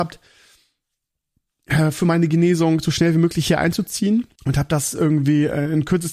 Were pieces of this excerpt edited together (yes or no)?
yes